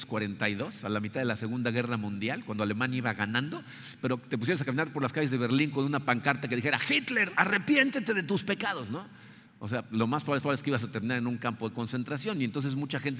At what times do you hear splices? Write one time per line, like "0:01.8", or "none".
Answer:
0:10.4